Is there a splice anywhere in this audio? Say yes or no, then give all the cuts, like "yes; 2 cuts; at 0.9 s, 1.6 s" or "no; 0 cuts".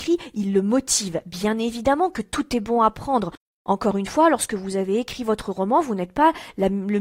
no; 0 cuts